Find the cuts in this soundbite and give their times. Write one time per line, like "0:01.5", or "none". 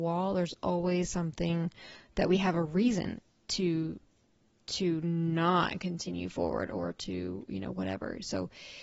none